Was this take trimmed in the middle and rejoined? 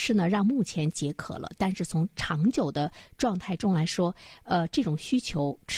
no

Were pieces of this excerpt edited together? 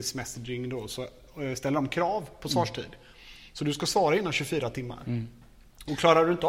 no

